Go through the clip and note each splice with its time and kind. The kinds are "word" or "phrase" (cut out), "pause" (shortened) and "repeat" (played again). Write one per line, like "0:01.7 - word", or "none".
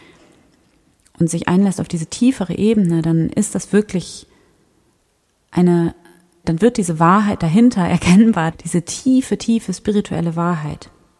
0:06.4 - word
0:08.5 - word